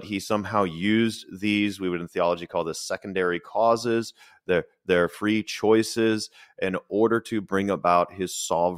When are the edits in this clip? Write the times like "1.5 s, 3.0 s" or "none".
none